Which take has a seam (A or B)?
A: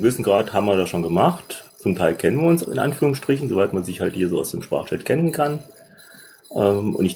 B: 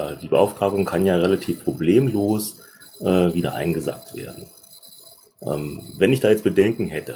A